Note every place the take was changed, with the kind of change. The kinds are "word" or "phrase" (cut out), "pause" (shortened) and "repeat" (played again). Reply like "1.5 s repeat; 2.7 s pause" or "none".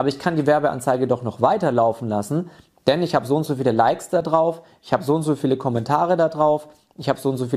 none